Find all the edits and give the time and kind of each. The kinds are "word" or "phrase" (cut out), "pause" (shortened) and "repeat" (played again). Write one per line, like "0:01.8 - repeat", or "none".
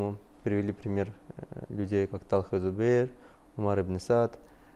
none